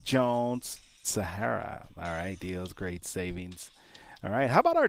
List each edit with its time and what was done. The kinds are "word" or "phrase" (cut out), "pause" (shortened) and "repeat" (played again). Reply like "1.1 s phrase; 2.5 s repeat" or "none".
1.0 s word; 2.4 s word